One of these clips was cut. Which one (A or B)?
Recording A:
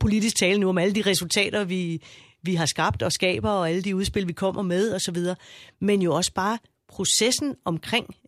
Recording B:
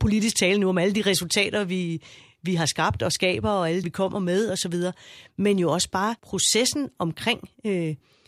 B